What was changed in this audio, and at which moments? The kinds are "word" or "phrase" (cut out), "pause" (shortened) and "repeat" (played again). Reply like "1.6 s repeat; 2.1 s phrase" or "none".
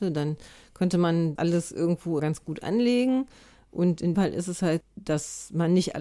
1.4 s word; 2.2 s word; 4.1 s word; 4.8 s word